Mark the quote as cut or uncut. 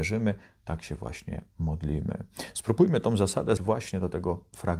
cut